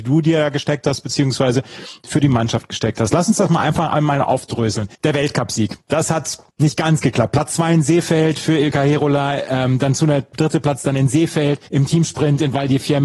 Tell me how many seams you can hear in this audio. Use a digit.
3